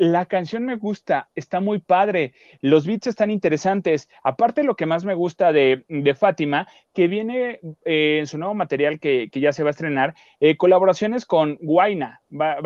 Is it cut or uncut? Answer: uncut